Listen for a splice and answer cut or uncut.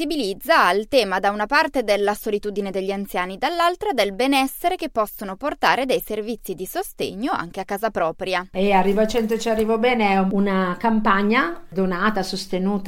uncut